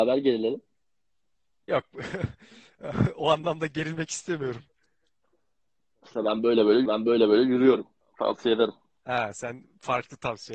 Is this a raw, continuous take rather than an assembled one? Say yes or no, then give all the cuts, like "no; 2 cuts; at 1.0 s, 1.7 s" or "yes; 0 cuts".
no; 1 cut; at 6.9 s